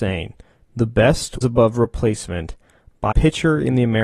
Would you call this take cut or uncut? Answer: cut